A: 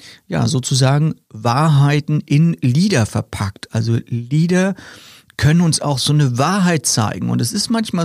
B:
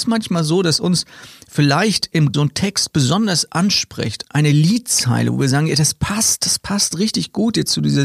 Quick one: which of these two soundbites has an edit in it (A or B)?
B